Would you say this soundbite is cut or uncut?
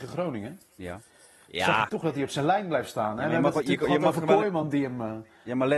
uncut